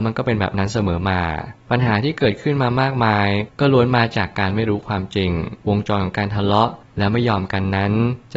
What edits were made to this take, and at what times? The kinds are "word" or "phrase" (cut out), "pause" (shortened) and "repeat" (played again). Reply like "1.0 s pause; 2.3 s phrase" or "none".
5.6 s pause